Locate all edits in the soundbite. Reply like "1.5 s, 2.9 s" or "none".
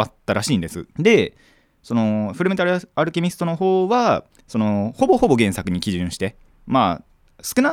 0.9 s, 6.5 s